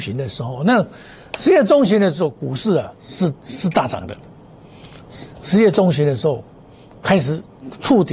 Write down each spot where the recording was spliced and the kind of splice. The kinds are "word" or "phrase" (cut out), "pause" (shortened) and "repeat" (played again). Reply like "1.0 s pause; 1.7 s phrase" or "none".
3.4 s pause

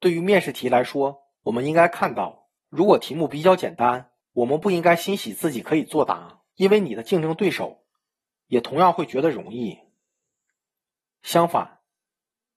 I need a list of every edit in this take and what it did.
1.3 s pause; 2.6 s pause; 4.2 s pause; 6.5 s pause

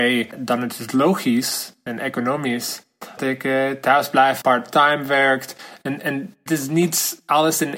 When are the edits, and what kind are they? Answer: 3.2 s word; 4.4 s word; 6.5 s word

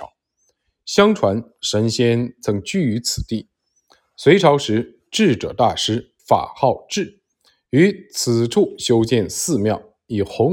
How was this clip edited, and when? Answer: 6.2 s pause

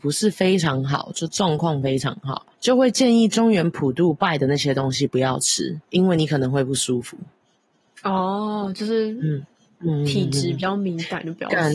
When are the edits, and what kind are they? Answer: 2.5 s pause; 5.8 s pause; 7.4 s pause

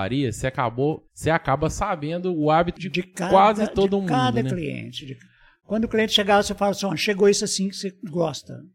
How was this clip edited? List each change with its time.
1.1 s pause; 2.8 s phrase

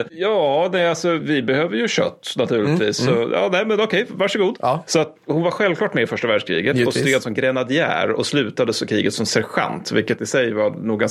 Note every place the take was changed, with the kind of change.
1.2 s word; 5.2 s word

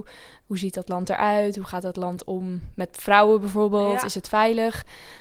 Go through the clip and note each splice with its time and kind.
none

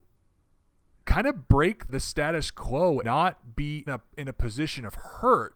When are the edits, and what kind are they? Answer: 1.9 s word; 3.0 s word; 3.9 s word

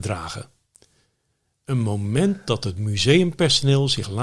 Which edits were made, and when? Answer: none

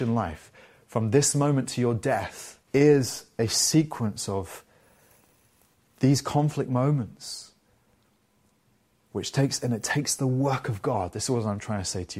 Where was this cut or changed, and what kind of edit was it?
2.6 s pause

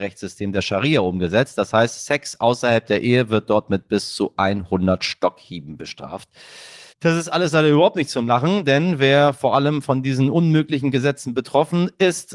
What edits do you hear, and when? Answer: 6.9 s pause

